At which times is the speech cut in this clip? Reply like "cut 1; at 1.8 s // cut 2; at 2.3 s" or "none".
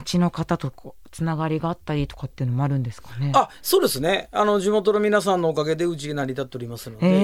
none